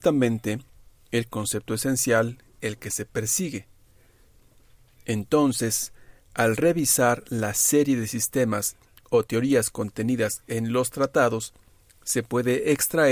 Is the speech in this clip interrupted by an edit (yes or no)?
no